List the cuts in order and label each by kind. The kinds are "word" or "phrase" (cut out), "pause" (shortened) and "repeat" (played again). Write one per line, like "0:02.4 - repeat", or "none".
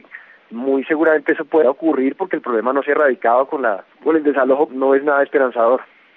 0:01.6 - word
0:03.9 - pause
0:04.7 - word